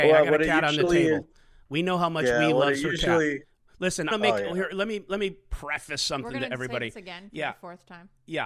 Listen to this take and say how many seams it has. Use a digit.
1